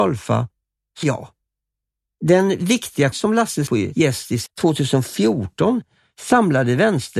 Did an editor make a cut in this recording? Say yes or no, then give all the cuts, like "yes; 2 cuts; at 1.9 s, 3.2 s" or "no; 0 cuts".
yes; 4 cuts; at 1.0 s, 3.1 s, 3.7 s, 4.5 s